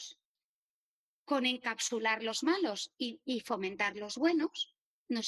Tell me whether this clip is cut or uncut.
uncut